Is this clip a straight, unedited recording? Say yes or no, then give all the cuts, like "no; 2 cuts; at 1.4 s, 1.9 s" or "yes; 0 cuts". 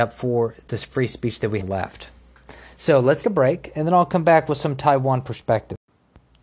no; 2 cuts; at 1.6 s, 3.2 s